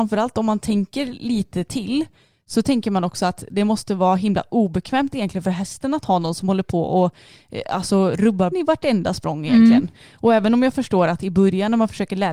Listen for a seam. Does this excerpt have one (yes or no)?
yes